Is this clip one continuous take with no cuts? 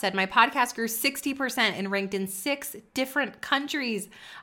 yes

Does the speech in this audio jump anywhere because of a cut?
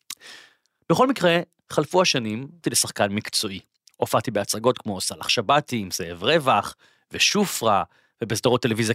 yes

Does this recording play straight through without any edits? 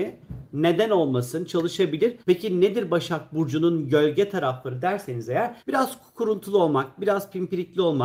no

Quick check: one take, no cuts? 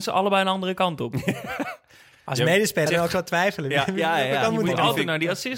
no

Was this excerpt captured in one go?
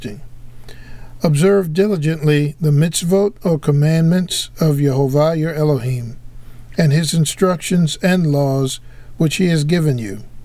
yes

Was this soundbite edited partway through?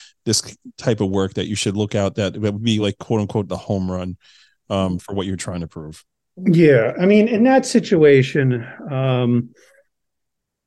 no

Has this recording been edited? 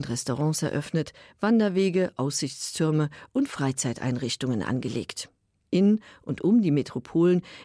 no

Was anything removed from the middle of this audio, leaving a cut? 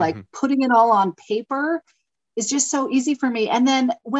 no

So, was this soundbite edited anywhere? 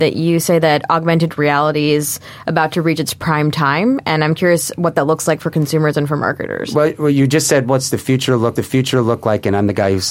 yes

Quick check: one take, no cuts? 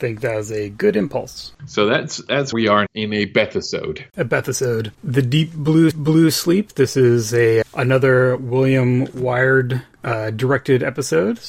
no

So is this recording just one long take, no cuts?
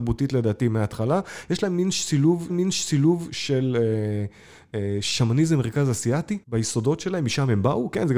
no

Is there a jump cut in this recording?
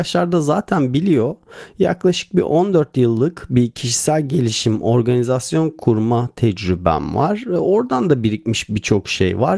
no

